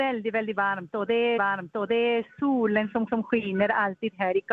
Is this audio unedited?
no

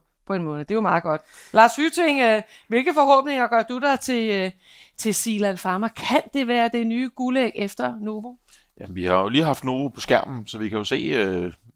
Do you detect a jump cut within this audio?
no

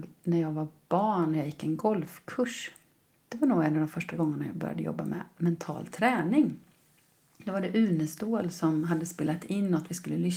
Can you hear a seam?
no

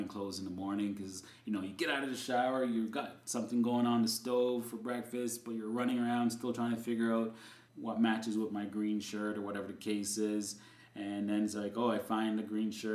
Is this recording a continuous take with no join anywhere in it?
yes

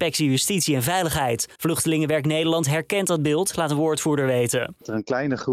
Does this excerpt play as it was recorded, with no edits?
no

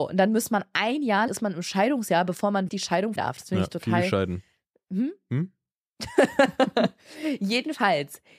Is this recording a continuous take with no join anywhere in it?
no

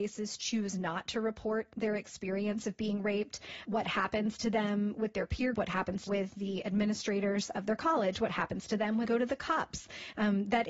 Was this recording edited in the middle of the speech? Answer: yes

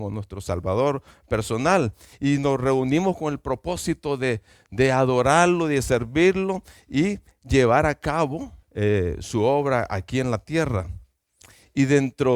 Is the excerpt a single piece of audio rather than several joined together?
no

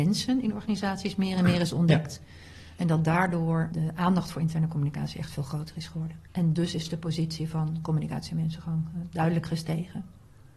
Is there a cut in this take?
yes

